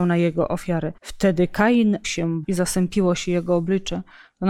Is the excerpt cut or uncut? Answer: cut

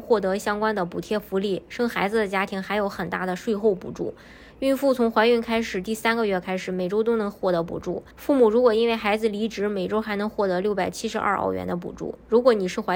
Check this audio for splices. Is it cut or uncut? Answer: cut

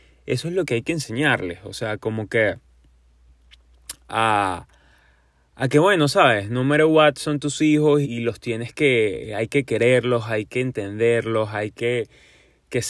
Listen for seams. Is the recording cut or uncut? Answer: cut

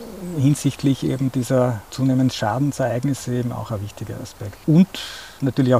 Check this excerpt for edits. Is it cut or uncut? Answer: uncut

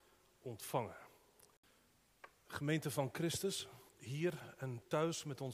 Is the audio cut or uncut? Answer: cut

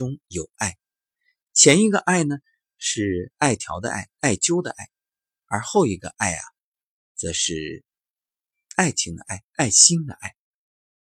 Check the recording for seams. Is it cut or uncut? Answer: uncut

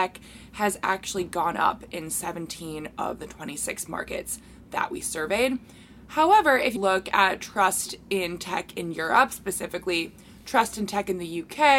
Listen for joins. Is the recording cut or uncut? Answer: cut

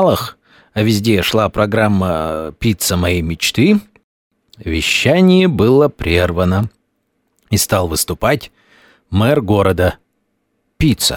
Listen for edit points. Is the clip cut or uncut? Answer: uncut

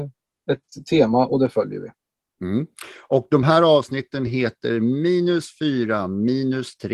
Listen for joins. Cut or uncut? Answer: uncut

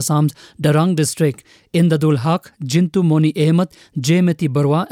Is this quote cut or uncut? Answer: uncut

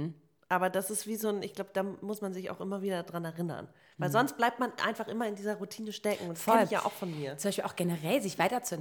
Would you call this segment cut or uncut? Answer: uncut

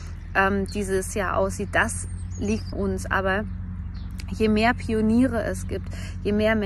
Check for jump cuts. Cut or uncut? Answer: cut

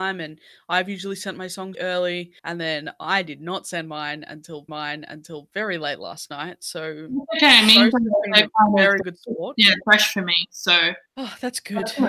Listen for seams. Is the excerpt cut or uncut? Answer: cut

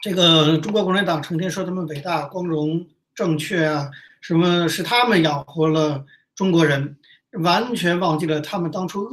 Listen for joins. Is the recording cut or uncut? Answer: uncut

